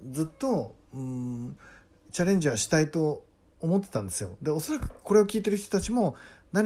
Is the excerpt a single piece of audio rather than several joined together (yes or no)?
yes